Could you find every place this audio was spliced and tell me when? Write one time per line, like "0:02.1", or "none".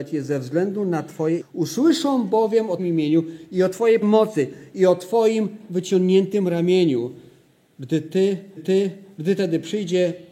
0:01.4
0:02.8
0:04.0
0:08.6